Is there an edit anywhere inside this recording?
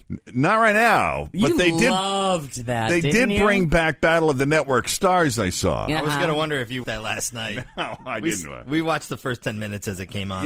yes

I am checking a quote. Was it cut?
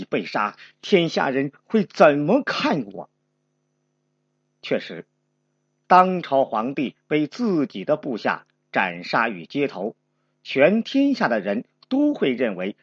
no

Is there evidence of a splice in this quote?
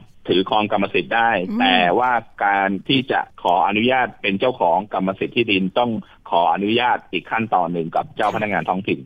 yes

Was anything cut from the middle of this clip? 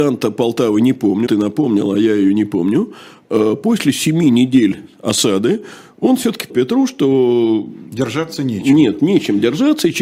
yes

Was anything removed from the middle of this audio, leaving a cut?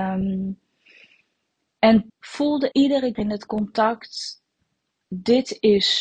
yes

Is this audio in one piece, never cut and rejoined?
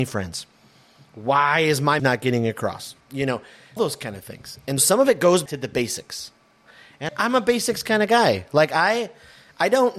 no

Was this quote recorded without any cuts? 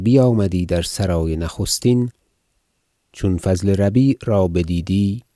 yes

